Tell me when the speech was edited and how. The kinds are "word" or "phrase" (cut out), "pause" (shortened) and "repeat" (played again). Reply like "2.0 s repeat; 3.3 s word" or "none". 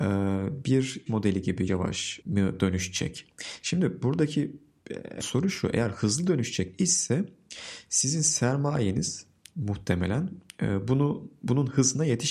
1.1 s word; 1.7 s word; 5.2 s word; 6.7 s word